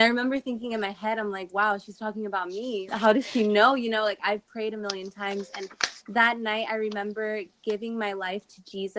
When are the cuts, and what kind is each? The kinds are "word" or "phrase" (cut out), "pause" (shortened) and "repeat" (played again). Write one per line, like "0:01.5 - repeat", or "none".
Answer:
0:02.9 - word